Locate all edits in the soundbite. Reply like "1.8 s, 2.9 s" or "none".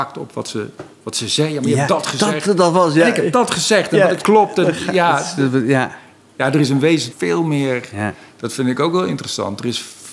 0.9 s, 4.2 s, 7.1 s